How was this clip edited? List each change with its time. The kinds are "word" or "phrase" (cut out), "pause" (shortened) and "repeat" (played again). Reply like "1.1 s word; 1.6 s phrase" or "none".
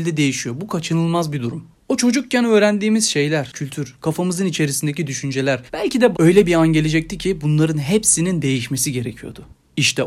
1.8 s pause; 3.5 s word; 5.7 s pause; 6.1 s word

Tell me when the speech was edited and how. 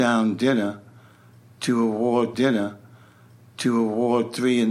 2.3 s repeat

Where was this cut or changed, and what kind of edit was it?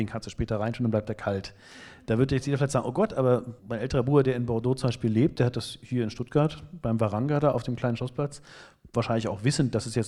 3.6 s pause

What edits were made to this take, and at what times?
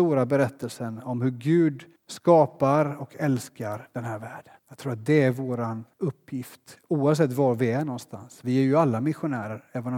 2.0 s pause; 4.6 s pause; 5.9 s pause

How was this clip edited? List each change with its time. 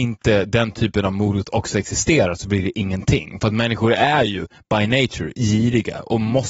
none

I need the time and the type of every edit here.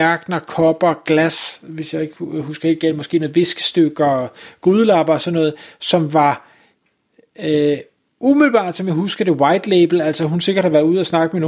none

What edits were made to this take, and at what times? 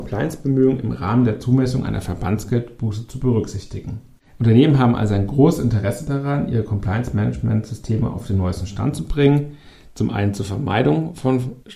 none

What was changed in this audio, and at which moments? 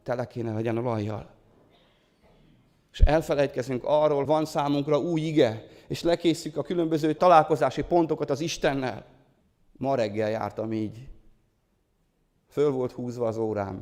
4.3 s word; 7.2 s word; 9.4 s pause

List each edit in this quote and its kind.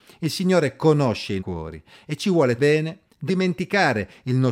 1.4 s word; 2.6 s word; 3.3 s word

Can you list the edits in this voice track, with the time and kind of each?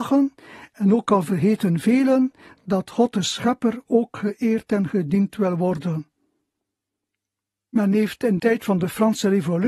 8.4 s word

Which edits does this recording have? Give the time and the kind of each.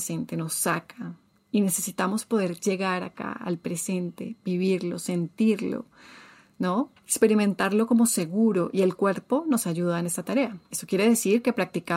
7.0 s pause

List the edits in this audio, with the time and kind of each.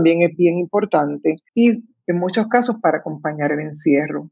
1.5 s pause

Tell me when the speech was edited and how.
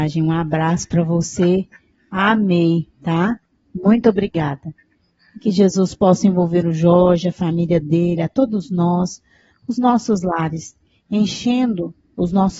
none

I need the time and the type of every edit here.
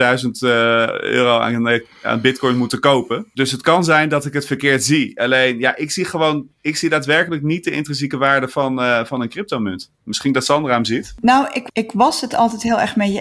6.5 s pause; 9.9 s pause

